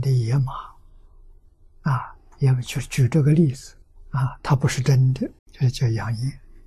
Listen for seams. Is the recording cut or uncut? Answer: cut